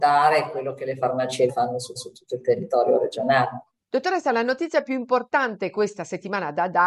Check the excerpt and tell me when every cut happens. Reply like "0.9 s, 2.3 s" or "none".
1.5 s, 2.0 s, 3.8 s